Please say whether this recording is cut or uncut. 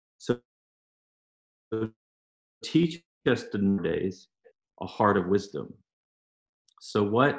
uncut